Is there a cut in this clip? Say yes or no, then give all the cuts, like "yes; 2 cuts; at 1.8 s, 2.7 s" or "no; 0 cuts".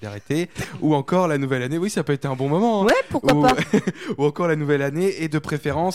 no; 0 cuts